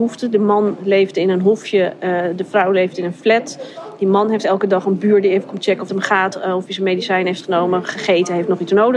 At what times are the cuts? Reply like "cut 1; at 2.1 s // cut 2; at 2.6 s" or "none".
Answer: cut 1; at 5.9 s